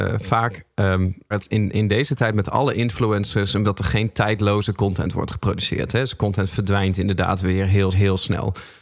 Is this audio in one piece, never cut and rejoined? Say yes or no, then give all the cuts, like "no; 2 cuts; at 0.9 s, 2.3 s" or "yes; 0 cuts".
no; 3 cuts; at 1.3 s, 3.6 s, 7.9 s